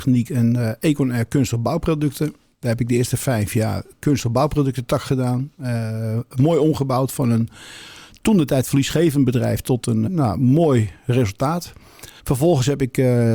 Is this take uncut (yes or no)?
no